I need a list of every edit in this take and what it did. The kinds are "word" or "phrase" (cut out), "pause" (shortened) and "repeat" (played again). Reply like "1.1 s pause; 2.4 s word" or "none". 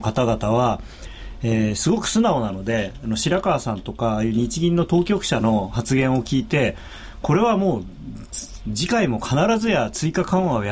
none